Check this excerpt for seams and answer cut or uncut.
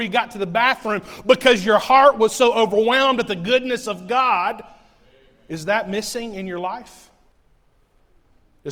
uncut